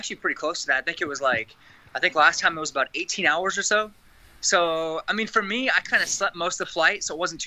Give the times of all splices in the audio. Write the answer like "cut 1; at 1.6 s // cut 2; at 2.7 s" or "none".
none